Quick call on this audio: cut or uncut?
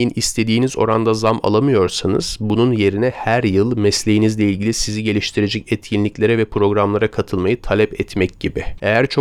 uncut